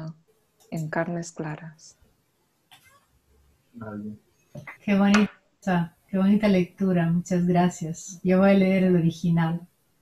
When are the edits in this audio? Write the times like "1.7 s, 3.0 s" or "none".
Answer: 4.8 s